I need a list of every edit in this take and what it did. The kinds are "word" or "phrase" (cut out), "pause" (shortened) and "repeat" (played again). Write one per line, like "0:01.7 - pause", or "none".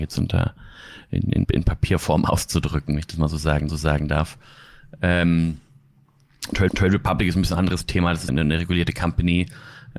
0:01.4 - word
0:03.7 - repeat
0:06.7 - repeat
0:08.3 - word

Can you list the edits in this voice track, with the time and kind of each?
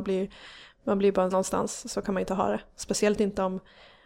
0:01.3 - word

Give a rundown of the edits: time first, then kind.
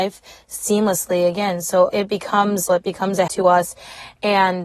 0:01.9 - word
0:02.7 - word
0:03.3 - word

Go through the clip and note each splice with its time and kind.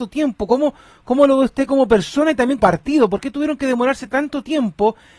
0:02.6 - word

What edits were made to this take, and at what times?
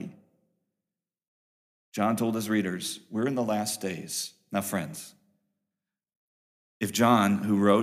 none

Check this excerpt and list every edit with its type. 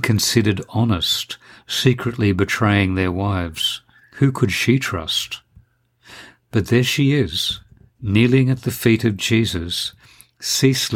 0:04.0 - pause

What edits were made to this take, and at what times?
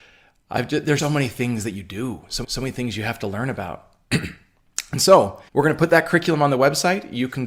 0:01.0 - word
0:02.4 - repeat
0:05.5 - pause

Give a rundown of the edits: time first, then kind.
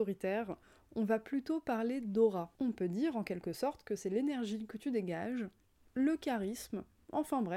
0:02.5 - pause

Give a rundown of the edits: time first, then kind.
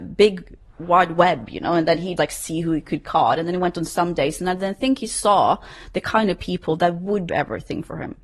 0:02.2 - word
0:07.3 - word

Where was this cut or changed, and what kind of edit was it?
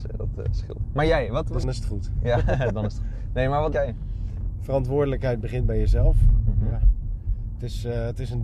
0:01.6 - word
0:03.7 - word

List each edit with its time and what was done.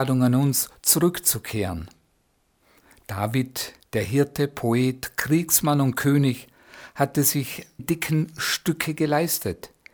0:03.8 - pause
0:07.8 - word

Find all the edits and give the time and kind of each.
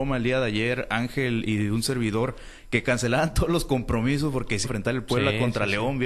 0:04.6 - phrase

